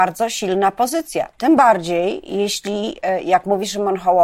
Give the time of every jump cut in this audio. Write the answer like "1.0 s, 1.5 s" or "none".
none